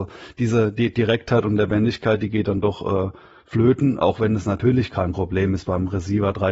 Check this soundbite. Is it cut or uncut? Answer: uncut